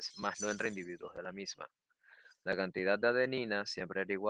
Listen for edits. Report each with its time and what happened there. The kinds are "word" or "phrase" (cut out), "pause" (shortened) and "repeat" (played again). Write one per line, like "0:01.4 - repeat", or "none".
none